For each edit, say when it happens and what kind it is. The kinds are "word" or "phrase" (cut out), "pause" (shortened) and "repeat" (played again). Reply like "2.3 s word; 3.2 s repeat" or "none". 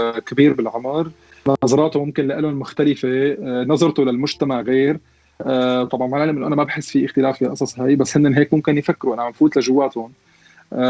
none